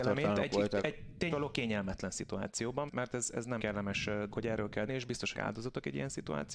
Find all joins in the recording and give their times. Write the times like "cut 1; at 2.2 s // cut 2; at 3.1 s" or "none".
cut 1; at 1.3 s // cut 2; at 2.9 s // cut 3; at 3.6 s // cut 4; at 4.3 s // cut 5; at 4.9 s // cut 6; at 5.3 s